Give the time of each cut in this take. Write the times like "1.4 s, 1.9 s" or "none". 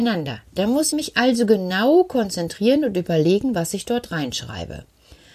0.9 s